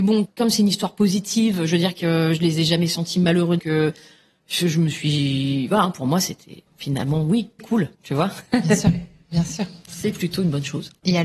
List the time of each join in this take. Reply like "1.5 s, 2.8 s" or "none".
3.6 s, 6.7 s, 7.6 s, 7.9 s